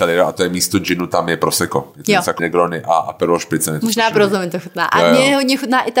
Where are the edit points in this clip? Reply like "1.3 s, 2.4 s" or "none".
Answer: 2.4 s